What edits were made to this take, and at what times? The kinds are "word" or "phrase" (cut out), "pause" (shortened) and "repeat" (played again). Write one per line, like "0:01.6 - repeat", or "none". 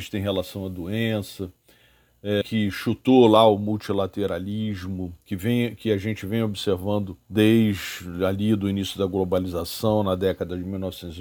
0:02.4 - word
0:05.2 - pause
0:07.2 - pause

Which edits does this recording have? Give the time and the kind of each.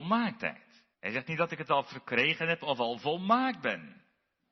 0:00.9 - pause

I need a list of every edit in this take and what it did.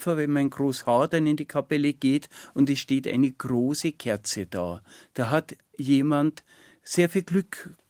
none

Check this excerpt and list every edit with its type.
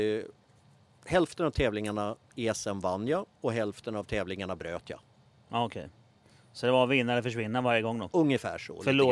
none

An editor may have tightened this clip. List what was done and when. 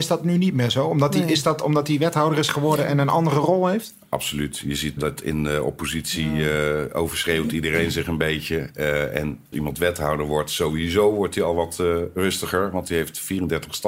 0:05.0 - word
0:09.5 - word

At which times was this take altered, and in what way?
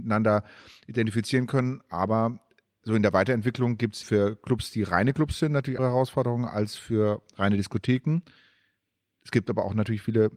0:04.0 - word
0:05.8 - word

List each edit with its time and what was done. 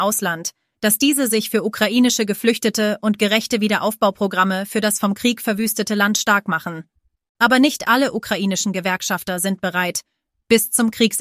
none

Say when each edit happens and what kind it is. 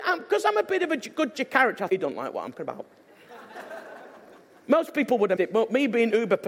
0:01.3 - word
0:01.9 - word
0:02.5 - word
0:05.4 - word

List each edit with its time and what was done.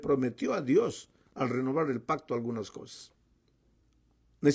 none

